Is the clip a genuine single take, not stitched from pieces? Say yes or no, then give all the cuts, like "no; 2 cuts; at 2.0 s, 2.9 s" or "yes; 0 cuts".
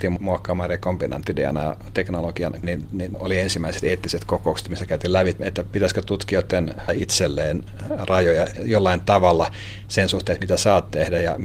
no; 3 cuts; at 2.6 s, 5.4 s, 6.9 s